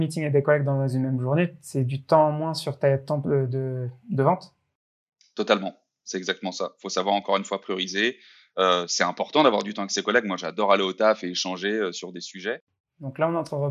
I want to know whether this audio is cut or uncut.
uncut